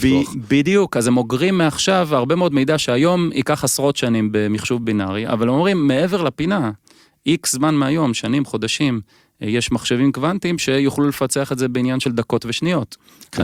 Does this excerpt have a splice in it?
no; 0 cuts

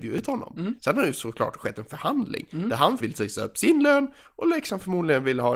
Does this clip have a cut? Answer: yes; 1 cut; at 3.0 s

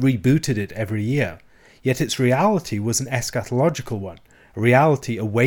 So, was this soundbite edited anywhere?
no; 0 cuts

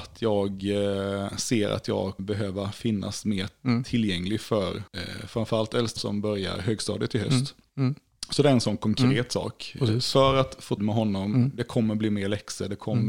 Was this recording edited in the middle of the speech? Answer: yes; 4 cuts; at 2.2 s, 4.9 s, 6.0 s, 10.8 s

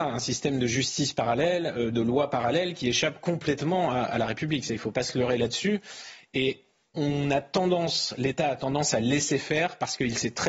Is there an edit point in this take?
no; 0 cuts

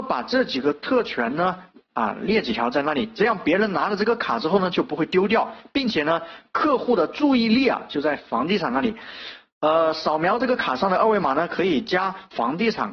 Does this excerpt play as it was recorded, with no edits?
yes; 0 cuts

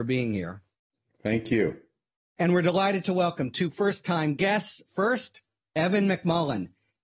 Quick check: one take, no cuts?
yes; 0 cuts

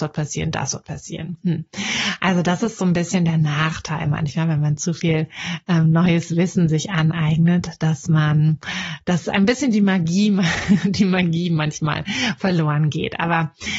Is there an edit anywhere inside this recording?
no; 0 cuts

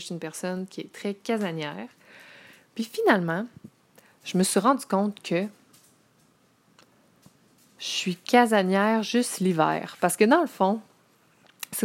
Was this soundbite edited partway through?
no; 0 cuts

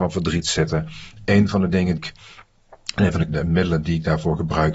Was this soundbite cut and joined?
yes; 2 cuts; at 2.0 s, 3.3 s

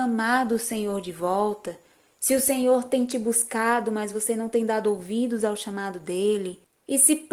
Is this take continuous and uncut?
yes; 0 cuts

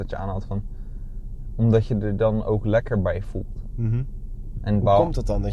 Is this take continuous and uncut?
yes; 0 cuts

